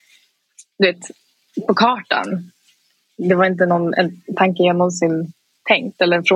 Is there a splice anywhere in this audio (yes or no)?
no